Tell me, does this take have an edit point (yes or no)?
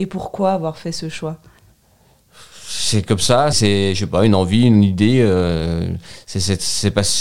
yes